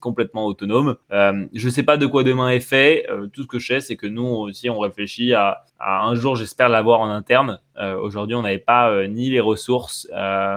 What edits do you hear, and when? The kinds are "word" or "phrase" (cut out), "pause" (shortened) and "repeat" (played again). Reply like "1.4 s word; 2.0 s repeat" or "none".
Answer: 1.0 s pause; 5.7 s pause